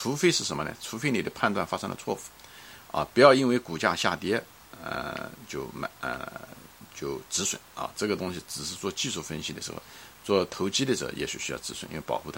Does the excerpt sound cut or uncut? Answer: uncut